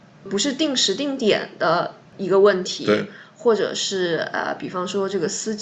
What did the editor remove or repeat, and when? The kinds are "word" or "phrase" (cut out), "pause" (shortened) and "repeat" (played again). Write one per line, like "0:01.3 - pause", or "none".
0:02.1 - pause

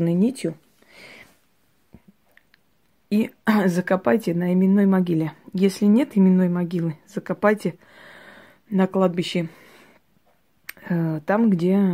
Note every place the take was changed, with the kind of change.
none

